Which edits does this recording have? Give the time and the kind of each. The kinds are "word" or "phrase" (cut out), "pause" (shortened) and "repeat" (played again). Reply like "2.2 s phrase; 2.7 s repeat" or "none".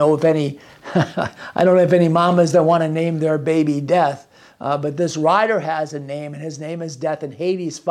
none